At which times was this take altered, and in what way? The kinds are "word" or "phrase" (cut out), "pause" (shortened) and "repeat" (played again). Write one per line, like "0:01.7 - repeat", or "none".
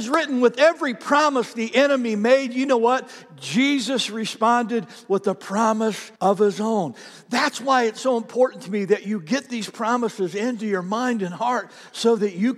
0:06.2 - pause